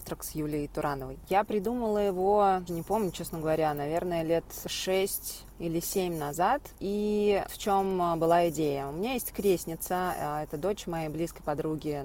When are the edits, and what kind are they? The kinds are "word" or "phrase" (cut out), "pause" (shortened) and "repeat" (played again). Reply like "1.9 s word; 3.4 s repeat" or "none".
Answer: 2.7 s word; 5.5 s pause; 7.5 s word